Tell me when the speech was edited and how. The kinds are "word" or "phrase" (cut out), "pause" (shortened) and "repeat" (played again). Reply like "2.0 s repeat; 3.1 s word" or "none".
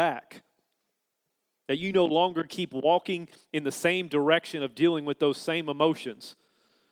none